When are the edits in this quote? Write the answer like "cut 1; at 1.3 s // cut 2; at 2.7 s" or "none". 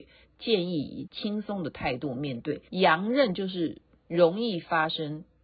cut 1; at 2.7 s